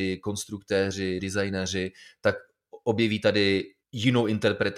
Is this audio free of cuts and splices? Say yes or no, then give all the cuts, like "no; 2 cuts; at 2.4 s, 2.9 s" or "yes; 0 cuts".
no; 2 cuts; at 1.2 s, 3.8 s